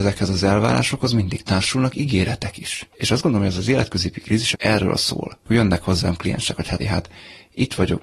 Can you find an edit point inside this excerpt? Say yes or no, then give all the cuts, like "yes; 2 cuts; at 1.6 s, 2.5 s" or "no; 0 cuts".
yes; 4 cuts; at 2.9 s, 4.5 s, 5.4 s, 6.8 s